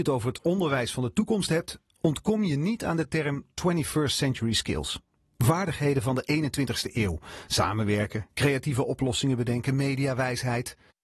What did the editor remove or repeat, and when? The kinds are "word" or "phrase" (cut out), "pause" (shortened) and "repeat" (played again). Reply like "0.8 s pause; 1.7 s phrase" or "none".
none

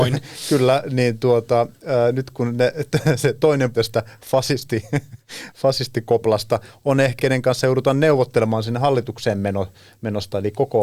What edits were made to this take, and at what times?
3.7 s word; 7.2 s word

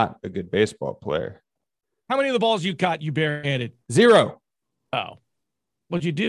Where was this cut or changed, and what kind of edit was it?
3.8 s pause

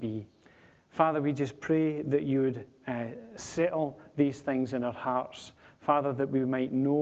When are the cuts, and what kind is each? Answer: none

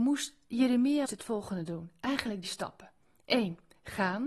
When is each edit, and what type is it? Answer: 1.1 s word; 2.4 s word

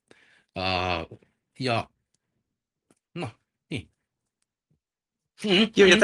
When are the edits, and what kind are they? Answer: none

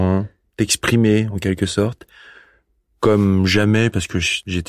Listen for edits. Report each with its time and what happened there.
none

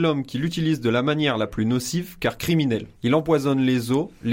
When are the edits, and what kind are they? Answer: 3.0 s pause

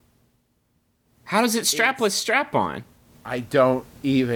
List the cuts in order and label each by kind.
3.0 s pause

